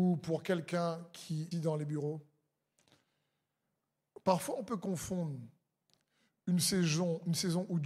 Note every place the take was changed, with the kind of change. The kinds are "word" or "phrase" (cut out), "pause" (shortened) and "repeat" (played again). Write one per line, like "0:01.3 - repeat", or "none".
0:01.5 - word